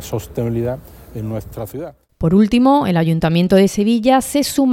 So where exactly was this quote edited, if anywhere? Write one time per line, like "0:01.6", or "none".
none